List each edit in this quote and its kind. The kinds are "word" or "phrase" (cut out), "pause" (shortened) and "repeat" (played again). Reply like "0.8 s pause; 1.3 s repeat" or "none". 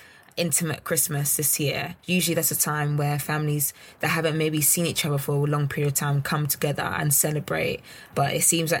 2.0 s pause